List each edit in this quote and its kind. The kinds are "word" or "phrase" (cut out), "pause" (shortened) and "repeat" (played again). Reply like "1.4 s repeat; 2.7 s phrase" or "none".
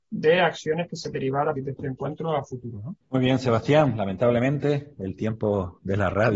1.1 s word; 1.6 s word; 3.0 s pause

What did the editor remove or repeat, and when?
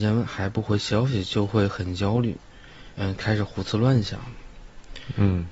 2.9 s pause

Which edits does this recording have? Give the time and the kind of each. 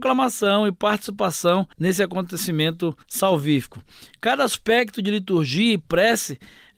1.7 s pause; 3.0 s pause

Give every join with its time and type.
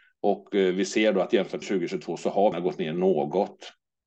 1.6 s phrase; 2.5 s word

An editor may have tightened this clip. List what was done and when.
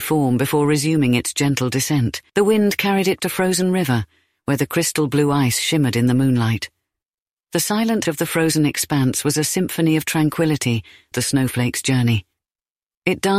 2.3 s pause; 3.2 s word; 8.0 s word; 11.1 s phrase

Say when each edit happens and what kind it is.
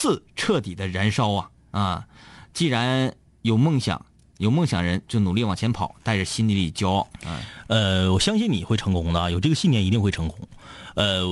none

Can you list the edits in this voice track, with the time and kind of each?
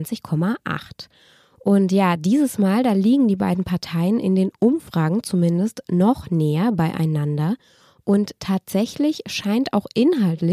none

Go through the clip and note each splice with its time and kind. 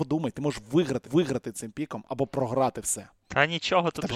1.0 s repeat

